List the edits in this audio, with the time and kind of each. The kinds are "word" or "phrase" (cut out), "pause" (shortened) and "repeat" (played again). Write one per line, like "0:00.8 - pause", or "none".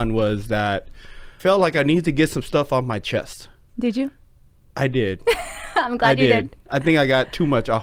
0:01.4 - word